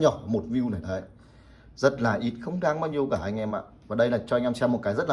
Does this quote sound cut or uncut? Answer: uncut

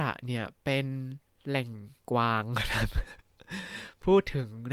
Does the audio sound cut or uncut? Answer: uncut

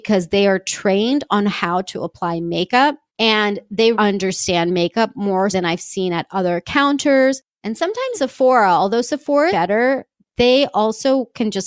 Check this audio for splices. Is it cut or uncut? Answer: cut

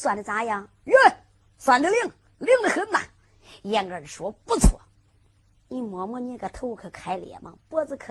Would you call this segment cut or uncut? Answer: uncut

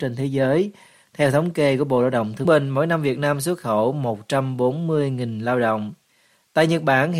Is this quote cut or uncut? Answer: cut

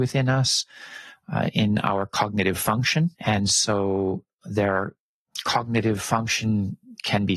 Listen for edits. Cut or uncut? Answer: cut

